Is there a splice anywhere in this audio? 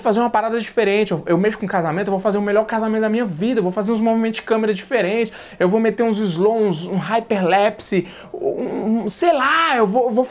no; 0 cuts

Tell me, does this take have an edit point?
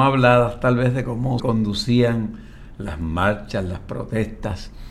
yes; 1 cut; at 1.4 s

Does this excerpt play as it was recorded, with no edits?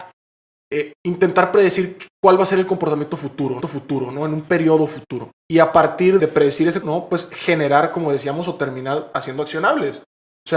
no; 4 cuts; at 3.6 s, 5.4 s, 6.2 s, 6.8 s

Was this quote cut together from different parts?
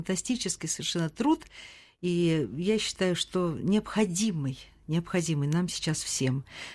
no; 0 cuts

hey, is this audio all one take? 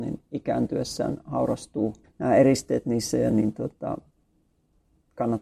no; 2 cuts; at 2.0 s, 3.3 s

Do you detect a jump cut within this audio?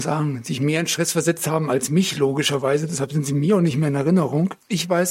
no; 0 cuts

